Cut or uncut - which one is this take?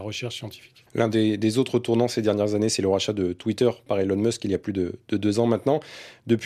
uncut